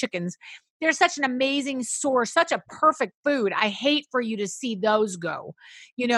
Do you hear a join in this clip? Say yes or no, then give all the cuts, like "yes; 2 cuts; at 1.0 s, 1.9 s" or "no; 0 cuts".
no; 0 cuts